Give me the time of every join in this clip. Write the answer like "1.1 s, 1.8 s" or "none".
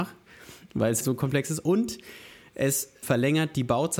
1.0 s, 3.0 s